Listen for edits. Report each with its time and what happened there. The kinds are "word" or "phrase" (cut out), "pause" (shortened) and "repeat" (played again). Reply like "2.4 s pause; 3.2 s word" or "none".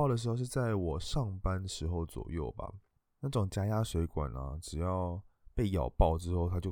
none